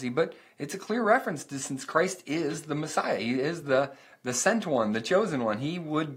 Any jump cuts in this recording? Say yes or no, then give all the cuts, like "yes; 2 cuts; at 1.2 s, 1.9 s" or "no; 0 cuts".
no; 0 cuts